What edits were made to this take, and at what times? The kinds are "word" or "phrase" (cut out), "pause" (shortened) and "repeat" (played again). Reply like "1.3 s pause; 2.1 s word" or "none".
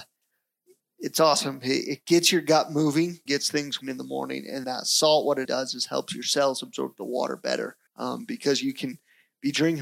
3.3 s word; 3.8 s word; 4.6 s word; 5.4 s word; 7.9 s pause